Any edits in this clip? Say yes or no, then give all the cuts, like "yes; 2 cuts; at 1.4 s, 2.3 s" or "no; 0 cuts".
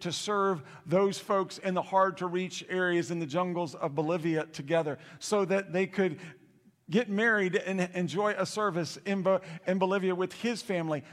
no; 0 cuts